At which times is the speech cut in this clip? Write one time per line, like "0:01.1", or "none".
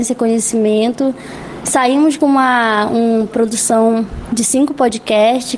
0:03.3